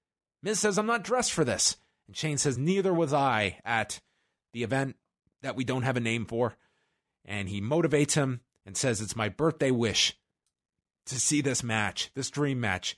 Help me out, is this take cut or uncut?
uncut